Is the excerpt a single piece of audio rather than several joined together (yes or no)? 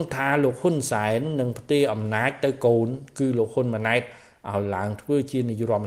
yes